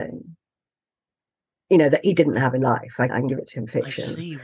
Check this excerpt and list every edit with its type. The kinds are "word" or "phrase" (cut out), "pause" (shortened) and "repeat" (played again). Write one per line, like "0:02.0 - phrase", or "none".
0:03.1 - word